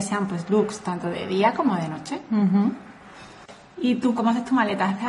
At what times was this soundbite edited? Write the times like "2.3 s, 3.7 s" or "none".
4.2 s